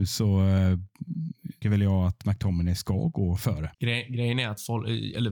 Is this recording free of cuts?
no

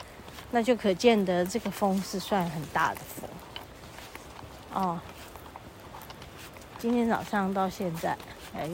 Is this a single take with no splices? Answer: no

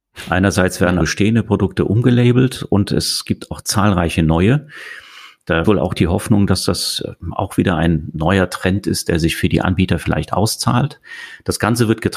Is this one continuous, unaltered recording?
no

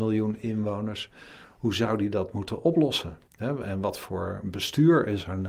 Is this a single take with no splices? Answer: no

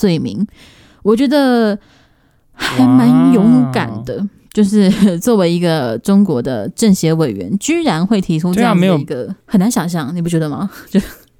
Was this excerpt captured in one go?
no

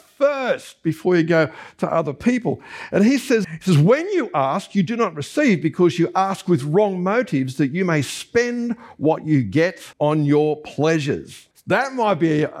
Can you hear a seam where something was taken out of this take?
yes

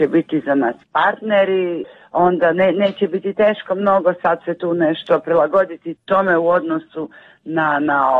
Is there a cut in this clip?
no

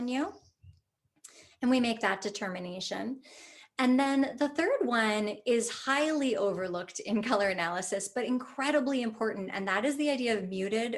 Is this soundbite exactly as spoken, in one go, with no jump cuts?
yes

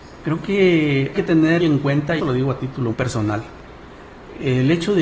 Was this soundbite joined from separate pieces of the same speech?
yes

